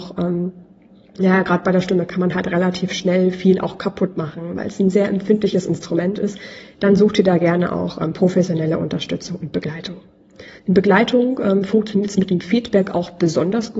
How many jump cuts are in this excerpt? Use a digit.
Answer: 1